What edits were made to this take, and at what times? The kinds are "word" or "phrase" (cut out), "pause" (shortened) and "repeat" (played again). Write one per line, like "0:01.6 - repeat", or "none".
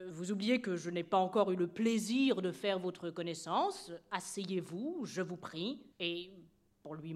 0:05.9 - pause